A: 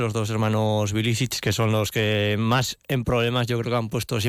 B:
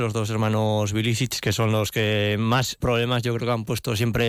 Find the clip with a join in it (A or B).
B